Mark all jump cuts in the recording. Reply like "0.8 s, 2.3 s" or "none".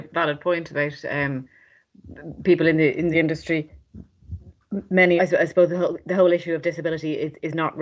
3.1 s, 5.2 s

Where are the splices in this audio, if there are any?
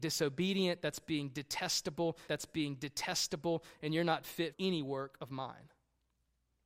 2.3 s, 4.5 s

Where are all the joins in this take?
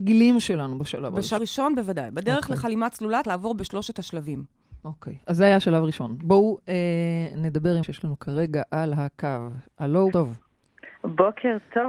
1.4 s, 3.2 s, 7.8 s, 10.1 s

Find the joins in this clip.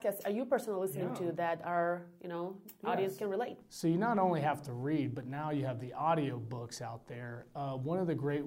none

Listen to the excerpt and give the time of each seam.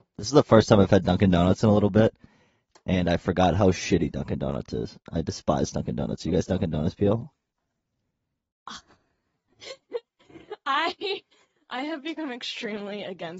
none

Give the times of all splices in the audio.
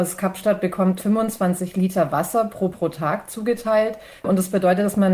1.0 s, 2.7 s, 4.2 s

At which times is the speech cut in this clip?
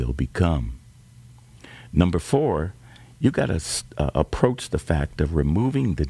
none

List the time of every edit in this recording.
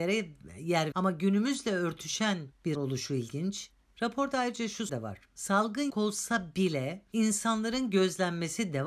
0.9 s, 2.8 s, 4.9 s, 5.9 s

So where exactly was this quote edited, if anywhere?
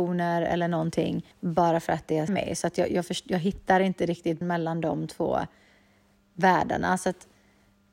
1.3 s, 2.3 s, 4.4 s

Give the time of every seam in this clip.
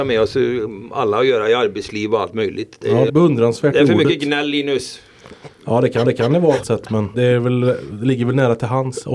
3.1 s, 6.0 s, 6.6 s, 7.1 s

